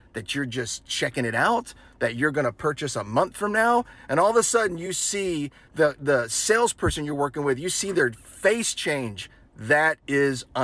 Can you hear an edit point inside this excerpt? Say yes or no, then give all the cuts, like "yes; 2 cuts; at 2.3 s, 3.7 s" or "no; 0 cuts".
no; 0 cuts